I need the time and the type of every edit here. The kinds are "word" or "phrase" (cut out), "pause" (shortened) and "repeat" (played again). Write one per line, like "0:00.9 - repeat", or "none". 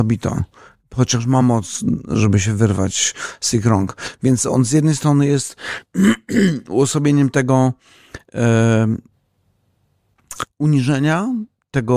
none